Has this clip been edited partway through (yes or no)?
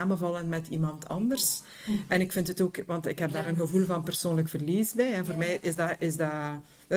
no